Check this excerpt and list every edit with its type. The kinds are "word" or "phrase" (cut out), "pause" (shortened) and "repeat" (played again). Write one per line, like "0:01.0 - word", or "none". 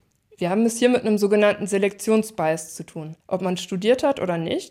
0:03.2 - pause